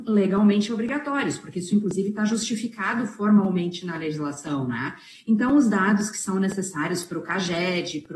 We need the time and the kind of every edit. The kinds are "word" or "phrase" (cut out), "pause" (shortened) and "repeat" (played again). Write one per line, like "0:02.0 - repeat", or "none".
none

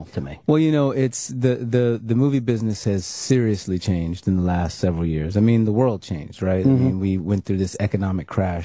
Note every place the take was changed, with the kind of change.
none

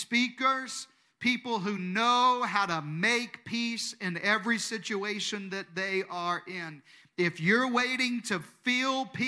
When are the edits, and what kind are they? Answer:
none

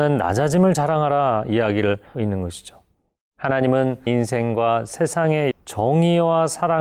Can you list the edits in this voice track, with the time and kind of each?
0:02.1 - word
0:04.1 - word
0:05.5 - word

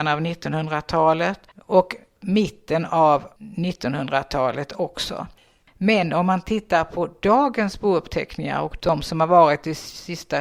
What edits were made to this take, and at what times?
none

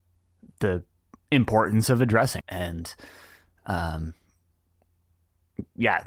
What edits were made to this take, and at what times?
0:02.4 - word

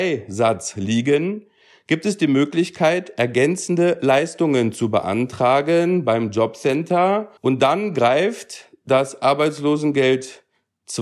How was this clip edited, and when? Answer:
0:07.4 - pause

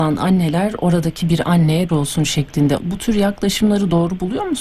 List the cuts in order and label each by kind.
0:01.9 - phrase
0:02.8 - word

